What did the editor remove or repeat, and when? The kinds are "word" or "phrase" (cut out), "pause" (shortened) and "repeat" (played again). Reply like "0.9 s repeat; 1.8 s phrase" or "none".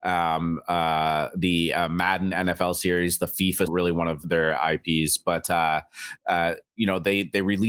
3.7 s phrase; 4.2 s word